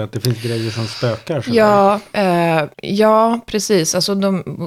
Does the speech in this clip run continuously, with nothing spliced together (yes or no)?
no